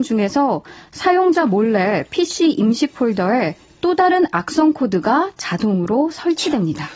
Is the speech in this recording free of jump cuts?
yes; 0 cuts

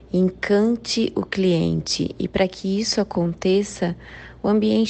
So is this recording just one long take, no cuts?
yes; 0 cuts

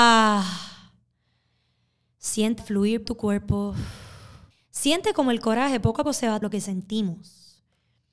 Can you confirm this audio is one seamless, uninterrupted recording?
no; 5 cuts; at 2.6 s, 3.1 s, 4.5 s, 6.0 s, 6.4 s

